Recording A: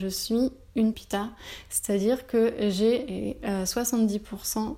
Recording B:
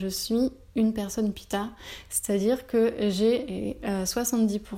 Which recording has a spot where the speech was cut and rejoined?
A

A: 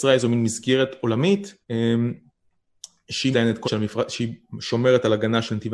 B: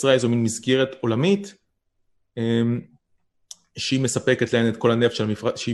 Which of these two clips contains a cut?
A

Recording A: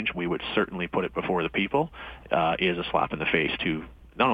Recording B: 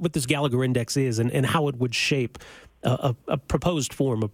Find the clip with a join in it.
B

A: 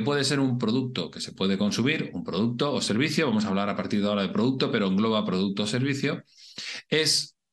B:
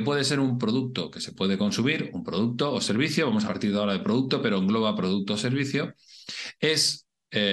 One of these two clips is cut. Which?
B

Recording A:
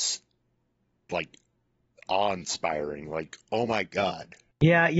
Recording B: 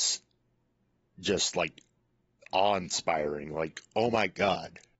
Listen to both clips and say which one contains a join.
A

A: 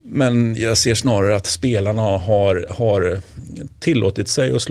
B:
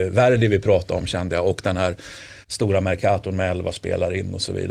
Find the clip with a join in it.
B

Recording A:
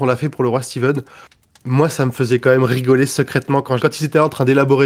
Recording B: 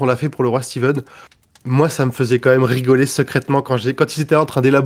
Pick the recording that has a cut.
A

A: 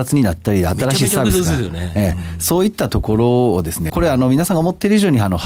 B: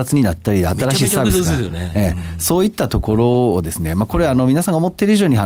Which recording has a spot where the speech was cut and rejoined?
A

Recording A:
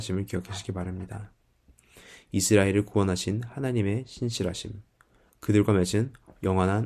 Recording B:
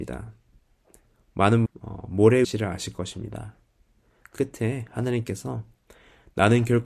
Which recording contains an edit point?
B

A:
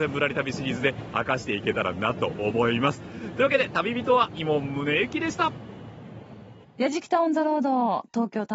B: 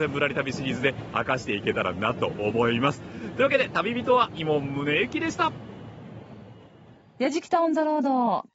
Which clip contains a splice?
A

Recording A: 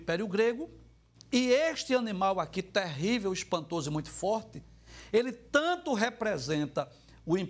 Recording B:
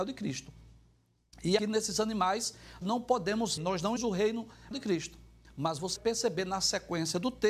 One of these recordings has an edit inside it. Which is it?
B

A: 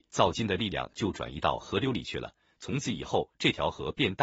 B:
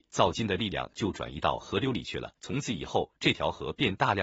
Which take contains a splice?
B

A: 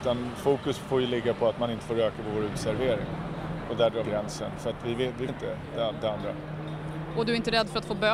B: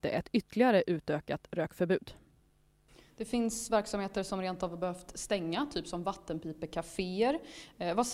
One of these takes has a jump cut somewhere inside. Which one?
A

